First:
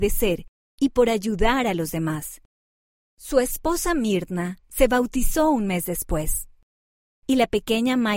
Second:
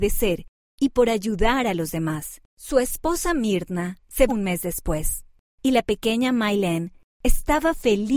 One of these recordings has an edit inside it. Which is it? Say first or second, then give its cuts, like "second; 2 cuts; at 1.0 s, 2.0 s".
second; 3 cuts; at 2.5 s, 4.3 s, 5.4 s